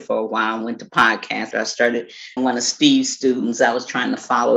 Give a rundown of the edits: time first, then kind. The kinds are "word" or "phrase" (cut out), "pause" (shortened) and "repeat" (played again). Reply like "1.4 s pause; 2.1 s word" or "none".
1.5 s word; 2.4 s word